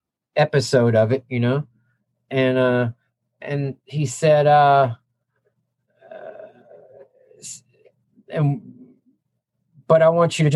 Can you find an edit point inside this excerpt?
yes; 1 cut; at 3.8 s

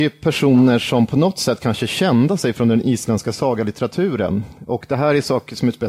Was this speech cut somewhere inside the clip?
no; 0 cuts

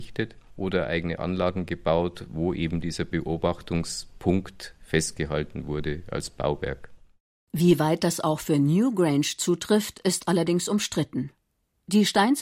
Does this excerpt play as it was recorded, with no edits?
yes; 0 cuts

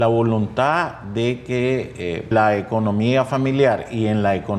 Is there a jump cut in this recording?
yes; 1 cut; at 2.3 s

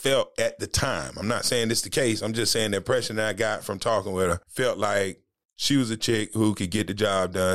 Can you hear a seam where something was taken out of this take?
yes; 1 cut; at 5.4 s

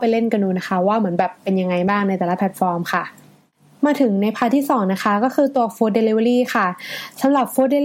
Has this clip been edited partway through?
no; 0 cuts

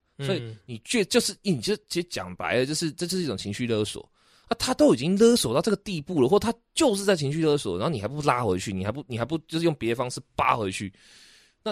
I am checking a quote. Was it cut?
no; 0 cuts

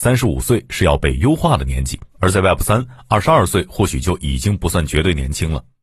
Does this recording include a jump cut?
yes; 1 cut; at 2.1 s

